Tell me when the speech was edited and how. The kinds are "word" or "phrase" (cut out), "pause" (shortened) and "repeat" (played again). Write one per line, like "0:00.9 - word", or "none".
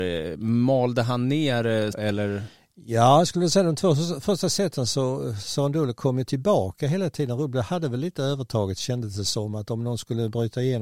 0:01.9 - word